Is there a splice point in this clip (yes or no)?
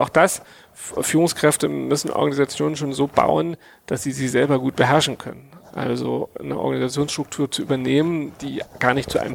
no